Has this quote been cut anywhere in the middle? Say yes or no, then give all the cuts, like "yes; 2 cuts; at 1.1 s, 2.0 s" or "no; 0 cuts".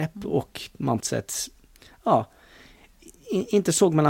yes; 1 cut; at 1.0 s